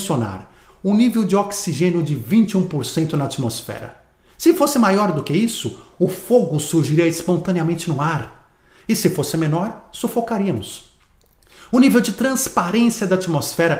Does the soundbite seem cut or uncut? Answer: uncut